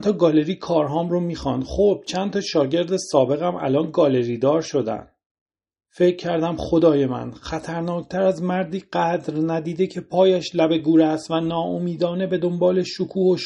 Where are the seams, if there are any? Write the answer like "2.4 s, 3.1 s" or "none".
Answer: none